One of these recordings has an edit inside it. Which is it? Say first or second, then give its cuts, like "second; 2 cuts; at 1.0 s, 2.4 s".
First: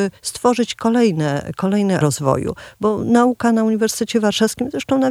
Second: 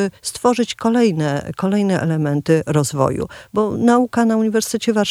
first; 1 cut; at 2.0 s